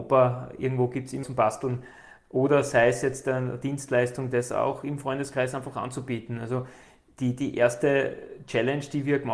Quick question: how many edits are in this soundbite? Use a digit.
1